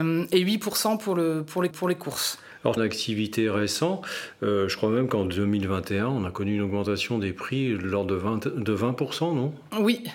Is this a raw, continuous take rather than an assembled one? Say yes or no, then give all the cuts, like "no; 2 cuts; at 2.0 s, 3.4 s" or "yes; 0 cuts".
no; 2 cuts; at 1.7 s, 2.8 s